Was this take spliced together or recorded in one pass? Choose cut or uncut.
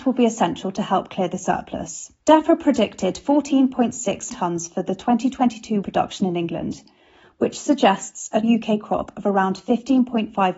cut